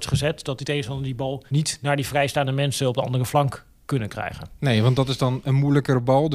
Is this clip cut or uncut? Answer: cut